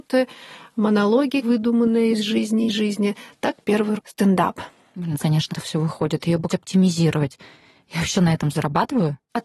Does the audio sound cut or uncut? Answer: cut